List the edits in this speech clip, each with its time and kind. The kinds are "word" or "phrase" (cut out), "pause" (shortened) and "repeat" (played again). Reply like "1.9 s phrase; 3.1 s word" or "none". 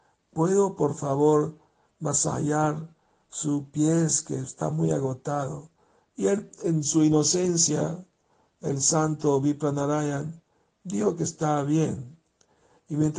none